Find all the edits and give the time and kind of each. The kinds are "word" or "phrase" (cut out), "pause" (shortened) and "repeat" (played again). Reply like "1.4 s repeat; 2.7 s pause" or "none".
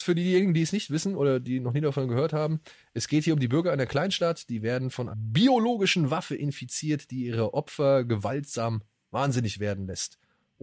5.1 s word